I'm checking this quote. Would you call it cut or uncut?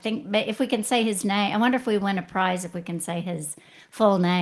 uncut